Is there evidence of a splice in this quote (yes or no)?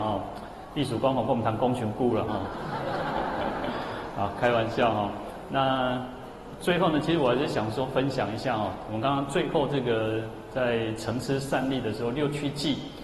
no